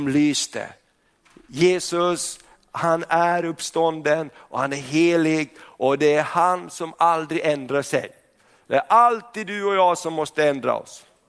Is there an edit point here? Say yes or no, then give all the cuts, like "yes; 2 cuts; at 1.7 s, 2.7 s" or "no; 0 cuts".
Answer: no; 0 cuts